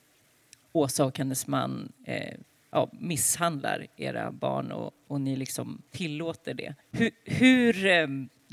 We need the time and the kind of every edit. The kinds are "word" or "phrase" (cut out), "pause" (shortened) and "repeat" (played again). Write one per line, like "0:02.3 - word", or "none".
0:02.5 - pause
0:05.9 - pause
0:06.8 - pause